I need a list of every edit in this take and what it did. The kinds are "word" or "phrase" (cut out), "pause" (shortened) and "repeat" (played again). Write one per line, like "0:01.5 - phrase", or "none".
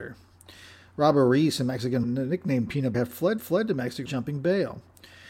0:02.0 - word
0:02.9 - word
0:03.4 - repeat
0:04.1 - word

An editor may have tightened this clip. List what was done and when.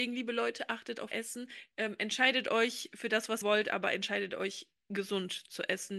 0:01.1 - word
0:03.4 - word

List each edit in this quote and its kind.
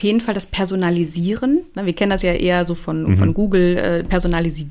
none

